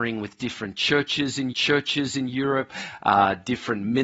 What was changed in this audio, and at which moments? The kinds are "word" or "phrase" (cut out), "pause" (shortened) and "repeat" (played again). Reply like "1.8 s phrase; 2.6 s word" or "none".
1.5 s repeat